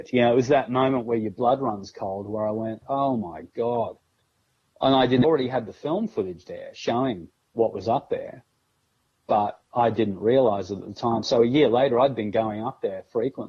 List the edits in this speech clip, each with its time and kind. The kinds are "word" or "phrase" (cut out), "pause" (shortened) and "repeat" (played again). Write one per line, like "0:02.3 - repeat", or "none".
0:05.2 - phrase